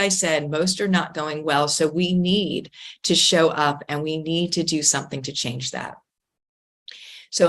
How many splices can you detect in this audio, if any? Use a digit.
0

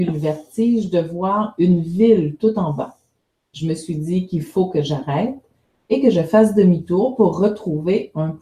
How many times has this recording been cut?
0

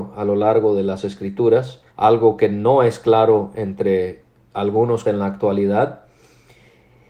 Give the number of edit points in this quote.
2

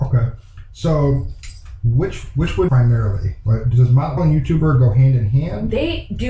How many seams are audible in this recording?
2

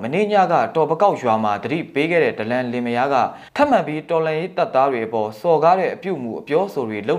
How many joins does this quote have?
1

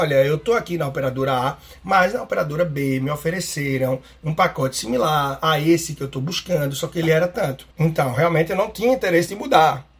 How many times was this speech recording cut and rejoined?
1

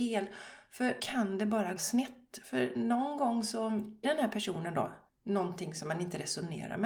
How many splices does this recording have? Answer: 4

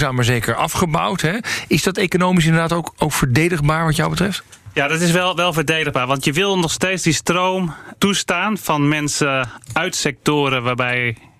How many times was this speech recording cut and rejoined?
0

